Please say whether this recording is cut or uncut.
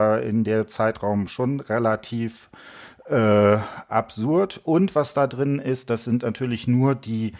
uncut